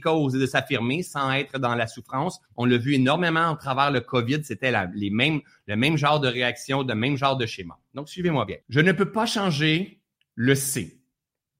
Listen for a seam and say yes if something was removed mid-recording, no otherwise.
yes